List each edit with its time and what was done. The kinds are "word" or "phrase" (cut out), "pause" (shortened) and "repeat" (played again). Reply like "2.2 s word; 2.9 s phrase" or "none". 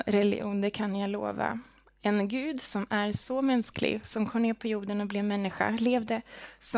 none